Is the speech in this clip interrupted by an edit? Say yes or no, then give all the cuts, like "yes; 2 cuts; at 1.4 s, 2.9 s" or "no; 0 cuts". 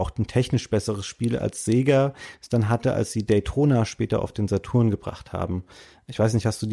no; 0 cuts